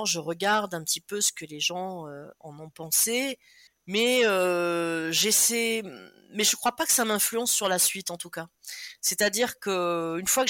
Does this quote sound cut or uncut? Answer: cut